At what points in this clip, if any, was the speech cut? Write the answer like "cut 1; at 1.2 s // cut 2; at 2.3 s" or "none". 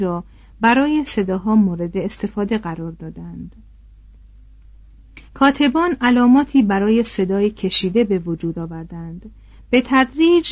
cut 1; at 5.3 s